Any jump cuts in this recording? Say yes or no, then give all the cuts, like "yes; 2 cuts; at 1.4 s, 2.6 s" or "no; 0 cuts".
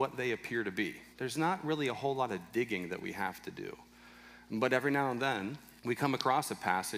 yes; 2 cuts; at 1.1 s, 5.8 s